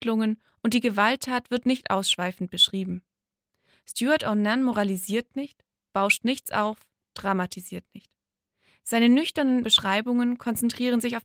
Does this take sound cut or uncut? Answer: uncut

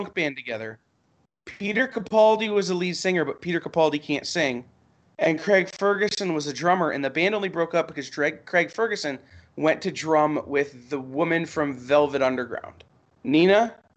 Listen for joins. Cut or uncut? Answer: uncut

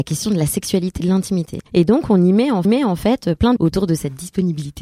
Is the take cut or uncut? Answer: cut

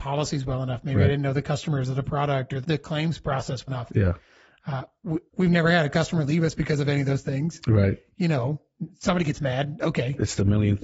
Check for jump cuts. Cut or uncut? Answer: cut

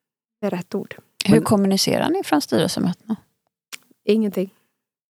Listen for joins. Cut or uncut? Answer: uncut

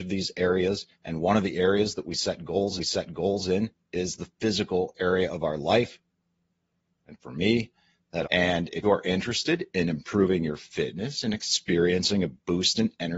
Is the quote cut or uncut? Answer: cut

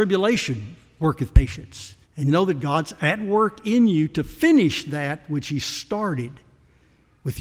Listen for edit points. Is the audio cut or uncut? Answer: cut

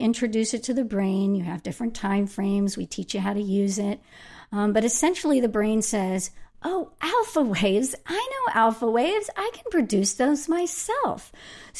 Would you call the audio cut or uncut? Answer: uncut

